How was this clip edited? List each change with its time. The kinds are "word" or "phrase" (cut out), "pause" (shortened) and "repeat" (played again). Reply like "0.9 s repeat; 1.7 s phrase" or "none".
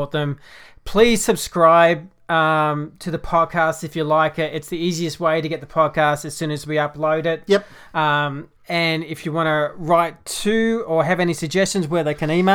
8.6 s pause